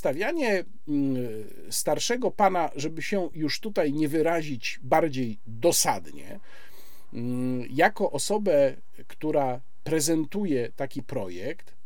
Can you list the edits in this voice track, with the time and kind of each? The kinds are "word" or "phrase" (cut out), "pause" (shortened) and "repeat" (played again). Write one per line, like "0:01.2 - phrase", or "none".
none